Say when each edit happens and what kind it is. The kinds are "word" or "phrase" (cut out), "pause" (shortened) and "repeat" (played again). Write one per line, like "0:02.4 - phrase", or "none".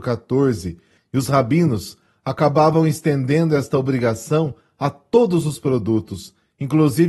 none